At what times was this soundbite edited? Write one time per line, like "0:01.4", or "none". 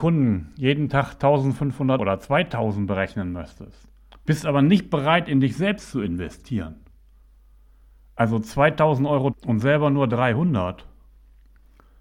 0:02.0
0:04.1
0:09.3

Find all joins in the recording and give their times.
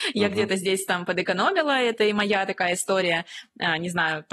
none

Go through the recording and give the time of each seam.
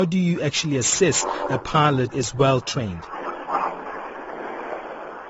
0:02.1

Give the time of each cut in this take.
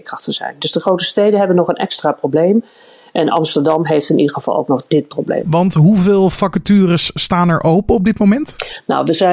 none

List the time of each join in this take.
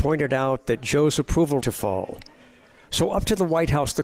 0:01.6

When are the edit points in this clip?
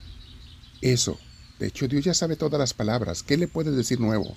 none

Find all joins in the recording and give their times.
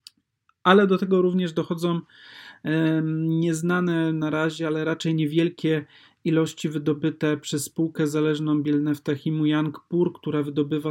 none

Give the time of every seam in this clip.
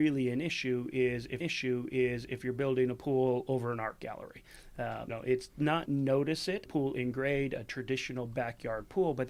0:01.4
0:05.1
0:05.9
0:06.7

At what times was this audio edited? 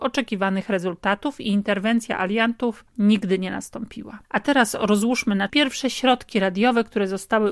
0:02.9
0:04.2
0:05.5

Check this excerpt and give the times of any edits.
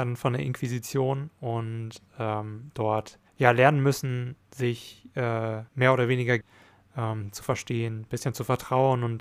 0:03.3
0:05.7
0:06.4

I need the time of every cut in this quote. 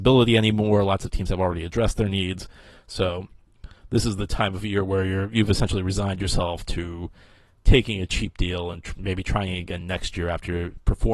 none

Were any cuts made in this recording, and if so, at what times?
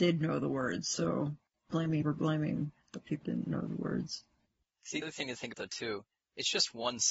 0:01.7
0:02.0
0:03.2
0:05.0
0:05.5

